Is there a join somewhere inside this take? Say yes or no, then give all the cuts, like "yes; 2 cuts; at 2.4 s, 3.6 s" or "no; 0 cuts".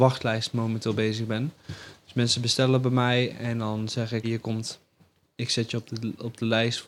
yes; 1 cut; at 4.2 s